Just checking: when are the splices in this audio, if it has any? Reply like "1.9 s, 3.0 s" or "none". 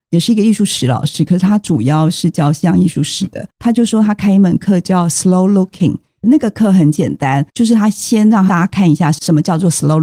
3.5 s, 7.5 s